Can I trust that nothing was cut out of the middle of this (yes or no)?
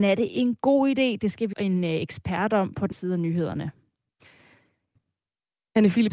no